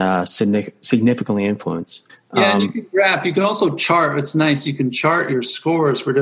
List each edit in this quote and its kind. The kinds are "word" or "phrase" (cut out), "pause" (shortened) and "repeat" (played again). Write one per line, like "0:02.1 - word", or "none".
0:02.1 - pause